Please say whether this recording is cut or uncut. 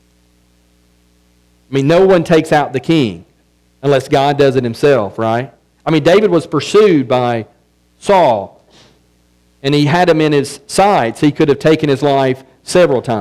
uncut